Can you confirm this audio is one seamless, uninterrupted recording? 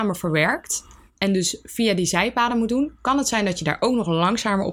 yes; 0 cuts

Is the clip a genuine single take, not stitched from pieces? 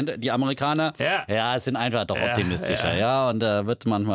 yes; 0 cuts

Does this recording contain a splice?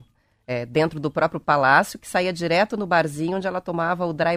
no; 0 cuts

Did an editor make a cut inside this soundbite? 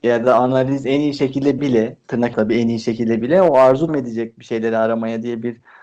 yes; 4 cuts; at 1.6 s, 2.3 s, 3.2 s, 3.9 s

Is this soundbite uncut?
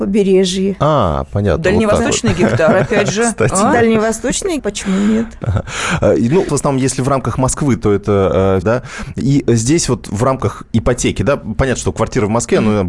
no; 3 cuts; at 4.6 s, 6.5 s, 8.6 s

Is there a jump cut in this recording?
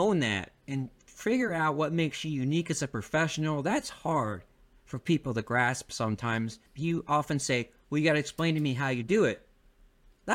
yes; 1 cut; at 6.7 s

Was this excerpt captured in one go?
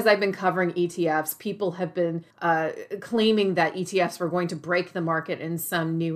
no; 1 cut; at 2.3 s

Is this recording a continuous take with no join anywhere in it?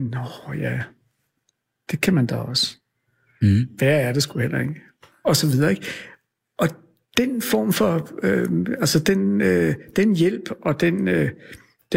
yes; 0 cuts

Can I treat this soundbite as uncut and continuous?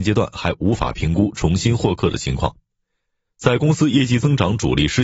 yes; 0 cuts

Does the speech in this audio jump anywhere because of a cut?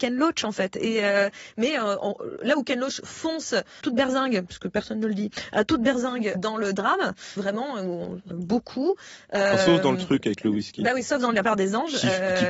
yes; 4 cuts; at 3.8 s, 6.4 s, 7.4 s, 8.3 s

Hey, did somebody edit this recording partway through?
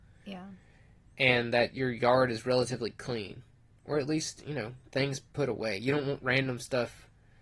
no; 0 cuts

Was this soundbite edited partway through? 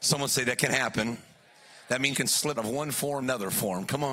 yes; 3 cuts; at 2.1 s, 2.6 s, 3.2 s

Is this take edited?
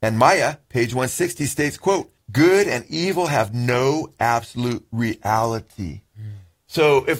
no; 0 cuts

